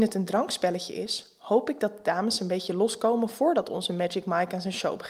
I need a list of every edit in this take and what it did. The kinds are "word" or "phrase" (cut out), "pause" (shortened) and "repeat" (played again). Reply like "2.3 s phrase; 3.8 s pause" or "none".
none

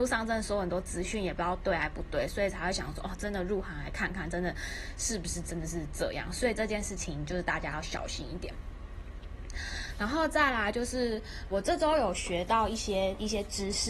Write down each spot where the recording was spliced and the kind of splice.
11.5 s word

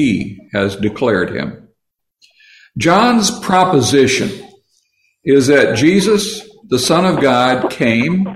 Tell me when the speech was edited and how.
none

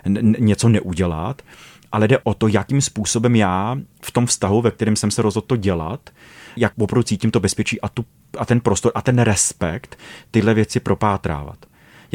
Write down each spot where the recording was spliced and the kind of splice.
none

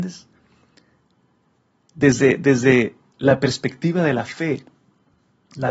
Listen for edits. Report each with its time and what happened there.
none

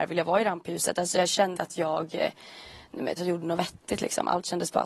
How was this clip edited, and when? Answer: 1.6 s word; 3.2 s word

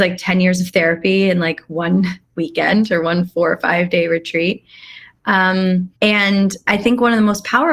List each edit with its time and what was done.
6.0 s pause

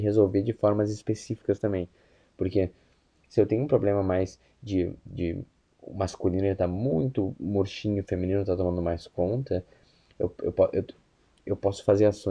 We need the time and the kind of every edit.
none

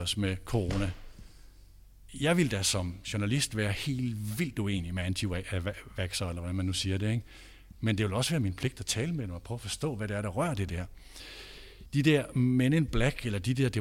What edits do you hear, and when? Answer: none

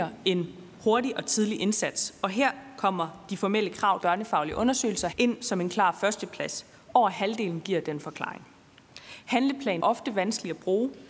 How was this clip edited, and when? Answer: 4.0 s phrase; 5.1 s word; 9.8 s word

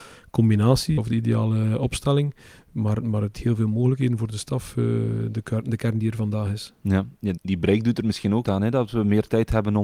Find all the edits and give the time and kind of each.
1.0 s word; 3.3 s word; 7.4 s word; 8.4 s word

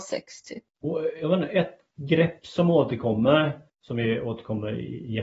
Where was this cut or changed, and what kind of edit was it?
3.7 s pause

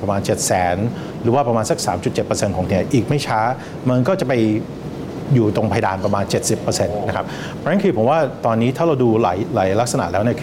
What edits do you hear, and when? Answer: 2.7 s word

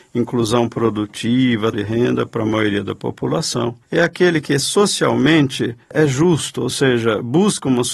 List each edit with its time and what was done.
1.7 s word; 5.8 s pause

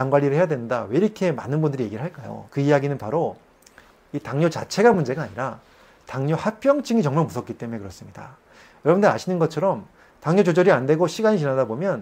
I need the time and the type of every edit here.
none

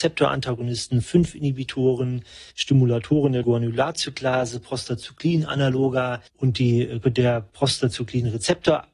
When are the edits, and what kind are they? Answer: 1.0 s word; 2.5 s pause; 3.4 s word; 6.3 s pause; 7.0 s word

